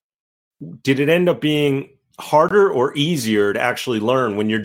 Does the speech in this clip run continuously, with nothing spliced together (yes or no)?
yes